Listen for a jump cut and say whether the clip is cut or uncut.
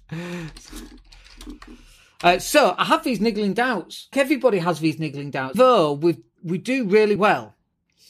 cut